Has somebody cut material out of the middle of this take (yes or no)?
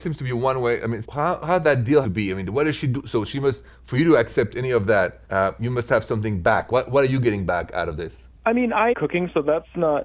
yes